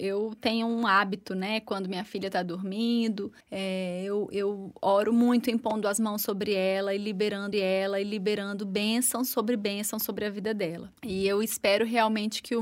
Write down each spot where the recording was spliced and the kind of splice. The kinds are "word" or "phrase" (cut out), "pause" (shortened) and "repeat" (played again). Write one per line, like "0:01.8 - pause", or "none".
0:03.4 - pause
0:07.5 - repeat
0:11.0 - pause